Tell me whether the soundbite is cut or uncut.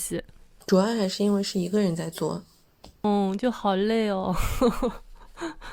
uncut